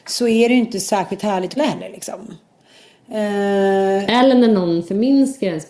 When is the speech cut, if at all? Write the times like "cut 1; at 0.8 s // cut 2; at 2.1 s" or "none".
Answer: cut 1; at 1.6 s